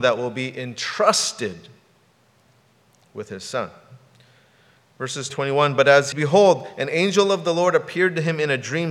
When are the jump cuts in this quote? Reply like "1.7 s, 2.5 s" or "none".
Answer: 5.3 s, 6.1 s

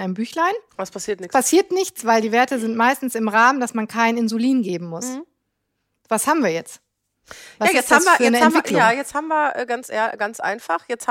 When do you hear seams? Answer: none

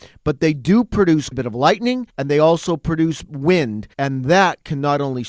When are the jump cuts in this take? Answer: 1.3 s, 2.1 s, 3.9 s

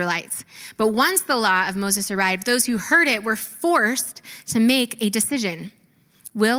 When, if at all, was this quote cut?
none

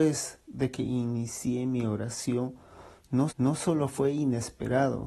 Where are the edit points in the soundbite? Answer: 3.3 s

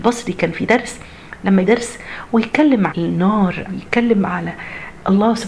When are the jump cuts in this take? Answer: 1.6 s, 2.9 s, 3.7 s

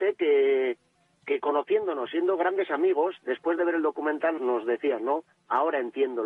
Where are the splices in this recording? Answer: 4.4 s

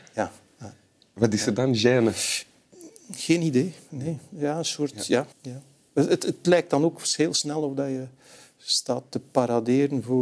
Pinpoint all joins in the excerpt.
5.3 s

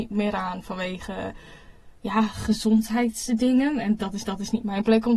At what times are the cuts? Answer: 2.0 s, 4.2 s

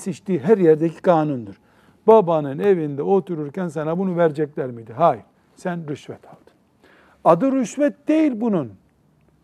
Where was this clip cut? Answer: none

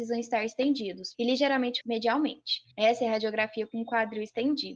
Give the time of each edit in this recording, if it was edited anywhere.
1.1 s, 1.8 s, 2.7 s

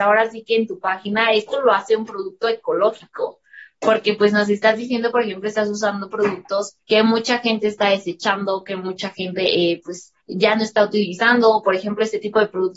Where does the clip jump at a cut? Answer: 6.8 s, 10.2 s

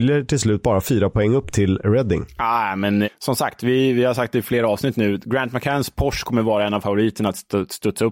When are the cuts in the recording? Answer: 3.0 s

